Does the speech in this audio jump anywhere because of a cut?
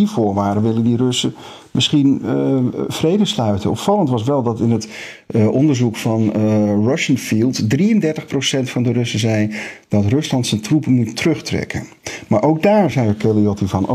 no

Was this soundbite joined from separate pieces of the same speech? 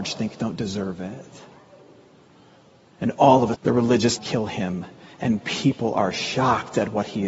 yes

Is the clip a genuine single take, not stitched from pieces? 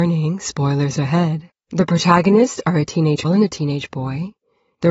no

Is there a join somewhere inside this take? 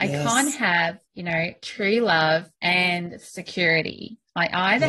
yes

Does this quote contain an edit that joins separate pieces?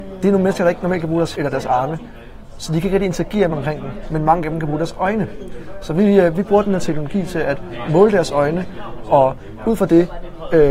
yes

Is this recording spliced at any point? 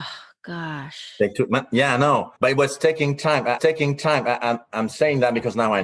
yes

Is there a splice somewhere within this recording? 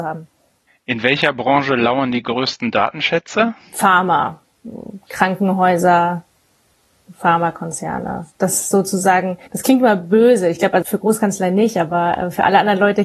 yes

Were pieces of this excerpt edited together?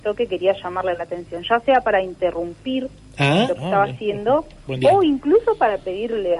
no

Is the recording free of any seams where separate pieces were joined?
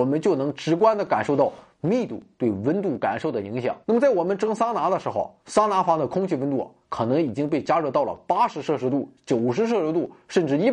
no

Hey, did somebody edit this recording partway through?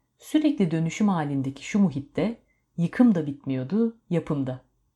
no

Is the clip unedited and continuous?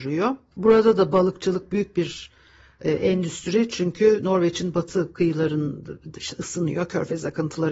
yes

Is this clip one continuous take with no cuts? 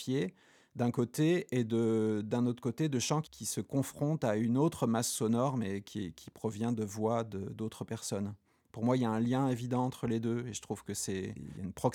yes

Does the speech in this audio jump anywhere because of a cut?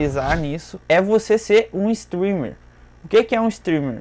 no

